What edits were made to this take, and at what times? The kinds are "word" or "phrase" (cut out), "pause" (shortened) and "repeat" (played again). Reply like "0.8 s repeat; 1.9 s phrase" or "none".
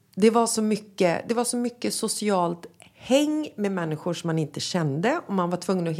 none